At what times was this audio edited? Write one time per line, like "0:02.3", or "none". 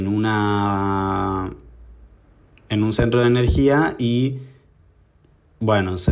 none